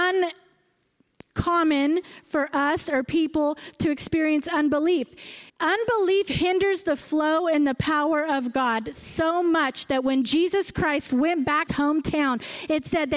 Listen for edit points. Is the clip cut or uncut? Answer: cut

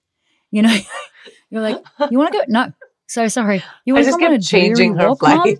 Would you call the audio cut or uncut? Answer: uncut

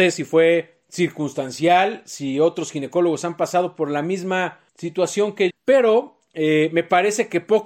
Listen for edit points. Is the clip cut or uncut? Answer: cut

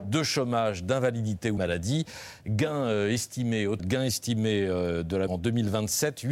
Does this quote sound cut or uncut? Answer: cut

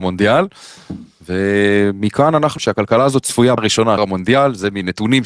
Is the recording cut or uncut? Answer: cut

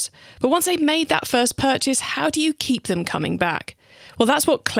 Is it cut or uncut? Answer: uncut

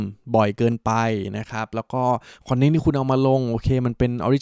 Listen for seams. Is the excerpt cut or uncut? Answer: uncut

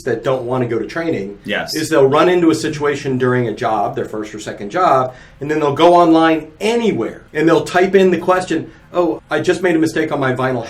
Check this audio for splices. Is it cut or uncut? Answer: cut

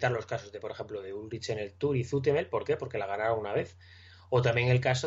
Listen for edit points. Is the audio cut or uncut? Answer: uncut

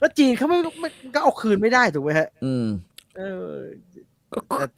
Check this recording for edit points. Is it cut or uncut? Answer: cut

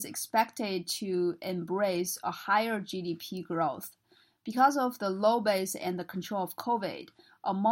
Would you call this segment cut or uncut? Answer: uncut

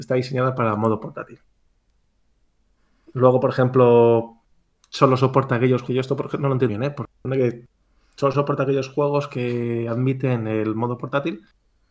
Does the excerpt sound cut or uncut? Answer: cut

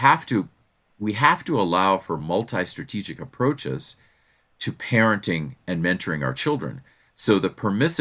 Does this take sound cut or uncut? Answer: uncut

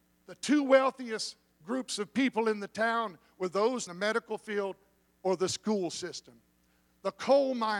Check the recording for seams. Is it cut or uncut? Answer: cut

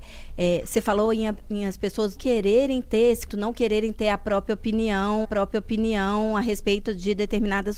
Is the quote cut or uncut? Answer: cut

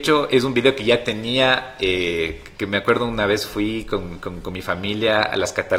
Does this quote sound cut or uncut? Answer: uncut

